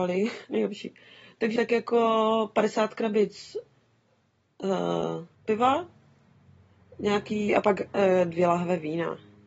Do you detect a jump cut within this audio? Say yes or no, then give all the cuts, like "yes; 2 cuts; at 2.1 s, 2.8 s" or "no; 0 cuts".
yes; 3 cuts; at 1.6 s, 5.3 s, 7.5 s